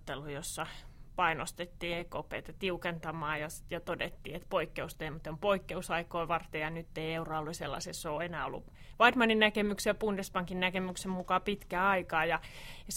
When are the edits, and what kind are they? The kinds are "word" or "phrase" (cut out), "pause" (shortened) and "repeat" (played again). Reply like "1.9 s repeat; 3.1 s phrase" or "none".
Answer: none

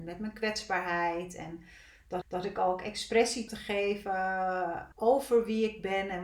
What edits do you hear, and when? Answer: 2.2 s repeat; 3.5 s word; 4.9 s pause

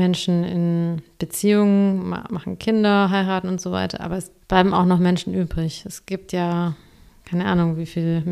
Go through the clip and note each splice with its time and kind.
4.4 s word

